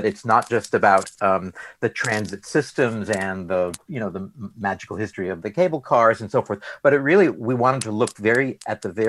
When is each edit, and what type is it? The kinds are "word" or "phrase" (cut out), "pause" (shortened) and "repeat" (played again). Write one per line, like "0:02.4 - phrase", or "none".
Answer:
none

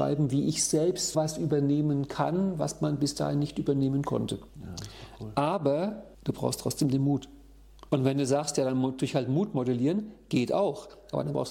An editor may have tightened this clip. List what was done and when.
0:01.1 - word
0:04.5 - pause
0:06.1 - pause
0:07.9 - pause

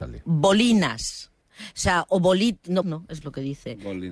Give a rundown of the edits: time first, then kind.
0:02.8 - word
0:03.2 - word

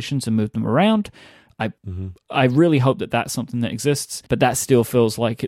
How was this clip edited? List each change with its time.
0:01.8 - pause
0:04.3 - pause

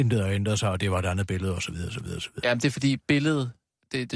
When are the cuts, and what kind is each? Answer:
none

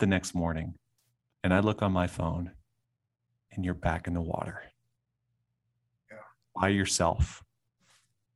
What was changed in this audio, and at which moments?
none

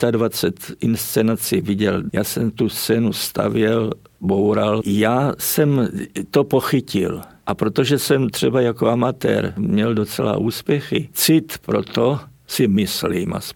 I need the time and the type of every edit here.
none

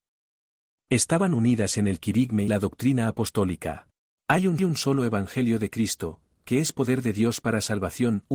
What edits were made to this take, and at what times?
0:02.5 - word
0:04.0 - pause
0:04.6 - repeat

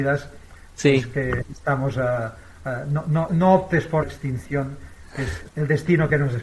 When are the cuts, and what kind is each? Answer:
0:03.3 - phrase
0:04.0 - word
0:05.5 - word

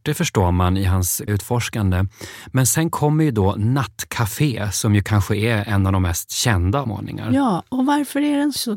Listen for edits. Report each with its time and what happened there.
0:01.3 - word
0:06.8 - phrase

